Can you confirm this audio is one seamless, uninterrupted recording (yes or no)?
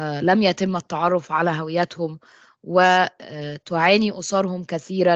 yes